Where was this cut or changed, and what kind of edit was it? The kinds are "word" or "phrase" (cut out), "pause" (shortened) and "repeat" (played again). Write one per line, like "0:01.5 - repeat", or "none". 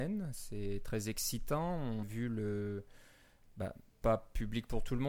0:02.0 - word
0:04.0 - word